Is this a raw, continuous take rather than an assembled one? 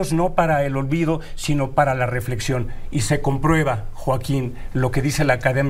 yes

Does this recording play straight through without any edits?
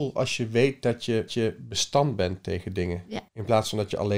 no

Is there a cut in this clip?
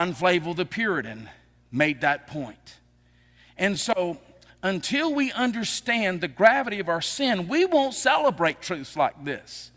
no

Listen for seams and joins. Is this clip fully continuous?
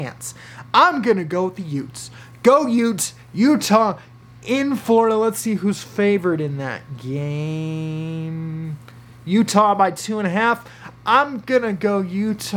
yes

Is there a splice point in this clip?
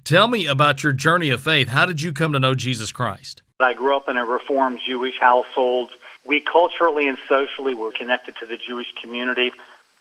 yes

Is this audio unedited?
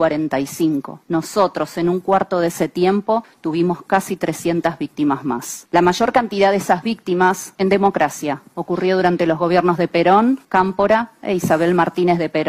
no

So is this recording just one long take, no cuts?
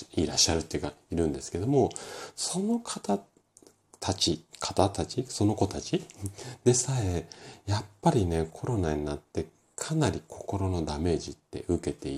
yes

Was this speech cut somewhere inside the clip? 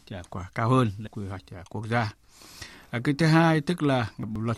yes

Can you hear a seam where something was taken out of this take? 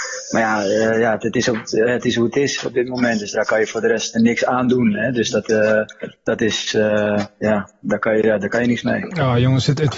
yes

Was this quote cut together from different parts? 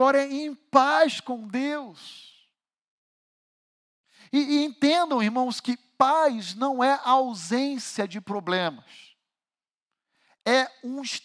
no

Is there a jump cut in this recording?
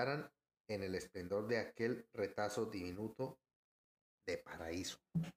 no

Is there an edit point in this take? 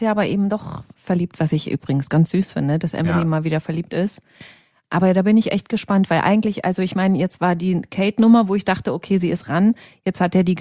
no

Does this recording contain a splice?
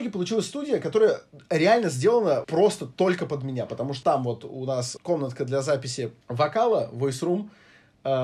yes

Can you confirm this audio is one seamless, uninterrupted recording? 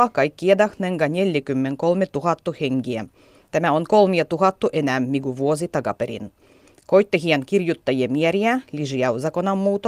yes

